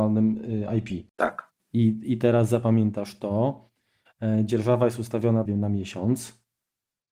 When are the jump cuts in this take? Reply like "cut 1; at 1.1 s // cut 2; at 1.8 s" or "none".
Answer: cut 1; at 5.5 s